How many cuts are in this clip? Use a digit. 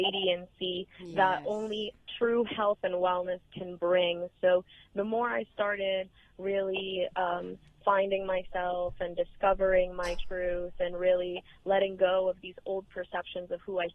0